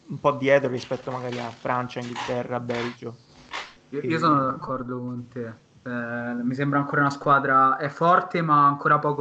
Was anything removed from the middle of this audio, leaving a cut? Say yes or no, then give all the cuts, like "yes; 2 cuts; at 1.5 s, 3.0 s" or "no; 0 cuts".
yes; 1 cut; at 3.8 s